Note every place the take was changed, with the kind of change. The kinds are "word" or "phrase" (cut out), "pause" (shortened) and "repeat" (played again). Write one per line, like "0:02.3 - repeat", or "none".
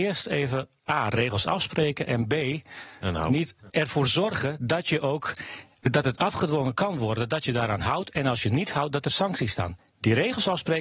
0:03.7 - word